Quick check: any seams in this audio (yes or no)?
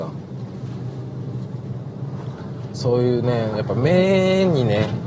no